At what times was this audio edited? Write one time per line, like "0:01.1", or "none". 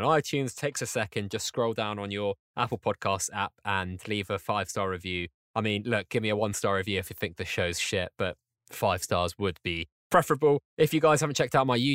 none